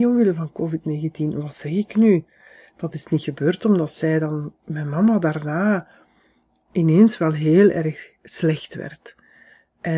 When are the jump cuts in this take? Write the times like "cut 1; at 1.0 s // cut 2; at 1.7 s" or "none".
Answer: none